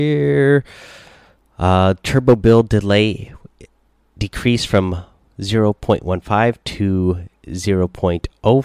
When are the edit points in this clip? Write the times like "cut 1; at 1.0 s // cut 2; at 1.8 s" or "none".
none